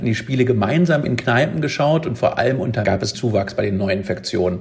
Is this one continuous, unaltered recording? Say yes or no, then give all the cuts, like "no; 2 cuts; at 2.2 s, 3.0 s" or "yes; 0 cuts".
no; 2 cuts; at 2.8 s, 3.1 s